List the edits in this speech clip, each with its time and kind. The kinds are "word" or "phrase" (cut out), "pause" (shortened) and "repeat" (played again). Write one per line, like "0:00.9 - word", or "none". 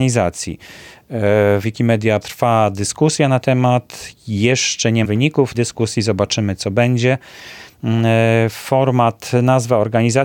0:01.6 - word
0:02.2 - word
0:03.4 - word
0:05.0 - word
0:05.5 - word